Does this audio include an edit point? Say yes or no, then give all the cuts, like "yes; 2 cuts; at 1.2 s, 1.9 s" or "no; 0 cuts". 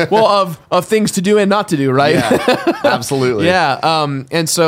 no; 0 cuts